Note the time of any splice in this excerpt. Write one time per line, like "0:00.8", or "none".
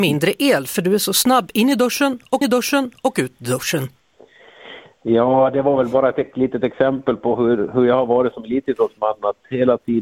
0:02.4